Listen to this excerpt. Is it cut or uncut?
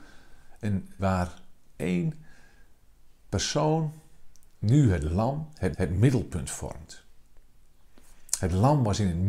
cut